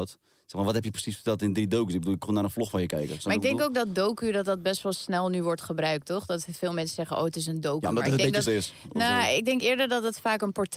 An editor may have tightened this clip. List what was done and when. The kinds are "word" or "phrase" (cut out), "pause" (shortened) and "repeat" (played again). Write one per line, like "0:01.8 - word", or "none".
0:02.2 - word
0:08.4 - phrase